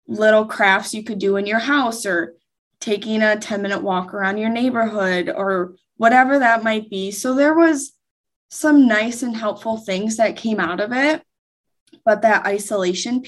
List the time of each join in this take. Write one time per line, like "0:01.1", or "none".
none

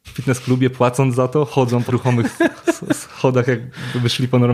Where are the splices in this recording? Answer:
0:01.9

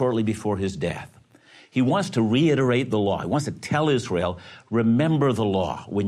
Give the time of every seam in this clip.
none

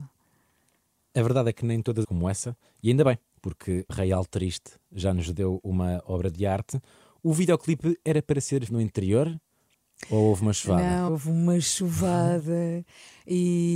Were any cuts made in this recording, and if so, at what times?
0:02.0
0:03.9
0:08.7
0:11.1

